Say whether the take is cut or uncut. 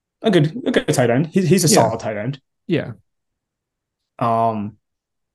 uncut